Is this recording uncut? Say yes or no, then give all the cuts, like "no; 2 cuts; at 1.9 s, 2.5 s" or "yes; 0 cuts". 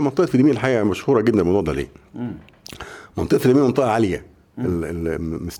yes; 0 cuts